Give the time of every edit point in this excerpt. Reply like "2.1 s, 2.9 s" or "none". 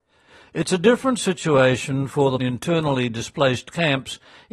2.4 s